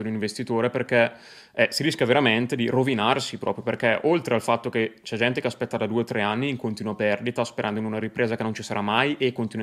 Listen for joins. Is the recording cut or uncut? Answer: uncut